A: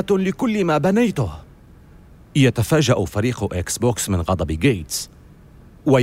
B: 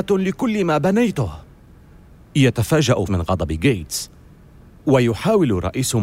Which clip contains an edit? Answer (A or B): B